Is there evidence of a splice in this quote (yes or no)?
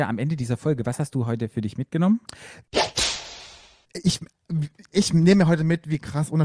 no